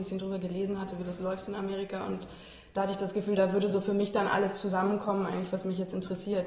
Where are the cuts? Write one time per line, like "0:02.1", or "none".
none